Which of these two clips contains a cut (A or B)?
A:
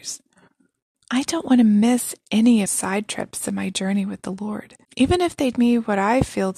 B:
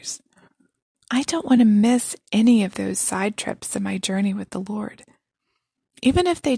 A